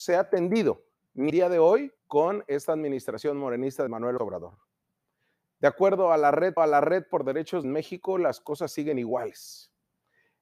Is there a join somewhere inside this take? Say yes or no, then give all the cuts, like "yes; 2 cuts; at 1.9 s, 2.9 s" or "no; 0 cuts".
yes; 6 cuts; at 1.3 s, 2.0 s, 3.9 s, 4.2 s, 6.6 s, 7.6 s